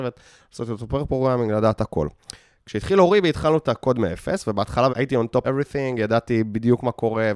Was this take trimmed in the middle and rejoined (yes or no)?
yes